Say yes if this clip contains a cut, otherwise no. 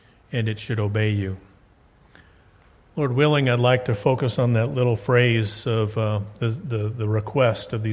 no